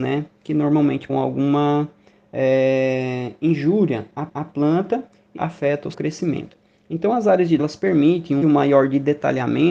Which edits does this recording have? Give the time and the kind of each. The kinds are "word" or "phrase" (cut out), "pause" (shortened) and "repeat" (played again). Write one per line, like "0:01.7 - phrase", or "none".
0:01.1 - word
0:04.3 - repeat
0:05.4 - word
0:05.9 - word
0:07.6 - word
0:08.4 - word